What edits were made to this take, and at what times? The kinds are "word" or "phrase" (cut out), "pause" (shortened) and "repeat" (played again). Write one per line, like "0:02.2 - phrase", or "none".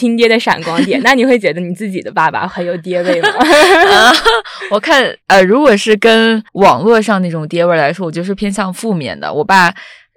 0:05.2 - pause
0:06.5 - pause